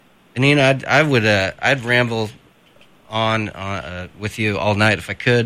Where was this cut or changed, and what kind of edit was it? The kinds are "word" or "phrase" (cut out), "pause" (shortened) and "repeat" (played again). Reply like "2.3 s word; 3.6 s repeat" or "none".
none